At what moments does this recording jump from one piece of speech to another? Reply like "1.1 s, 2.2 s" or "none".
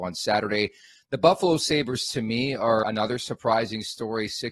2.8 s